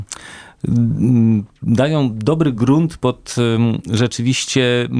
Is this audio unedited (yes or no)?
yes